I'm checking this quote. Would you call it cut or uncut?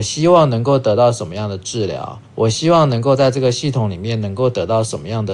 cut